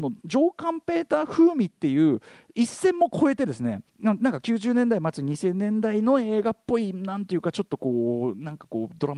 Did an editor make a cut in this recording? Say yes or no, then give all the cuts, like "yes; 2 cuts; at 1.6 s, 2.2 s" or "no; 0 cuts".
yes; 1 cut; at 3.9 s